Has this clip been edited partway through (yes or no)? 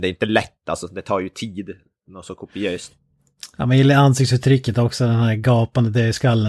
no